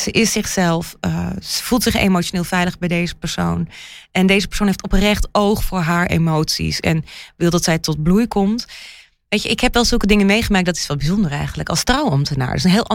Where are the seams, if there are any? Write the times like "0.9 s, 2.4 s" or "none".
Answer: none